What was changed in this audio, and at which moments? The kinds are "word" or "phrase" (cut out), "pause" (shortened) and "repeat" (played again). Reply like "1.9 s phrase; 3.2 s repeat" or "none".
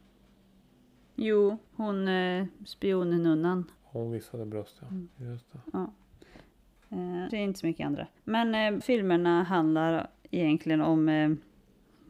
1.7 s pause; 3.8 s pause; 5.1 s pause; 7.3 s phrase; 8.2 s pause; 8.8 s word